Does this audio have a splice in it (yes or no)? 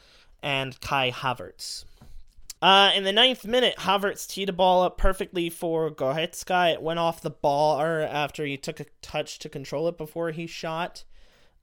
yes